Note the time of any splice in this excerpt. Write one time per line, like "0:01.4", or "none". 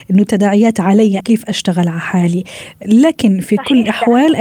0:01.2